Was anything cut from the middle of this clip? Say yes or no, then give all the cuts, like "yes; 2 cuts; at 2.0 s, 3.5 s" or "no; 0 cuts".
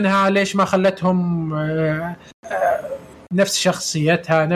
no; 0 cuts